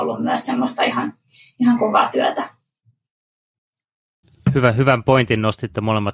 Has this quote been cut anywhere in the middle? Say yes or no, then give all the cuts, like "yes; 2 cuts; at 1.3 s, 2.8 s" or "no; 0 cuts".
no; 0 cuts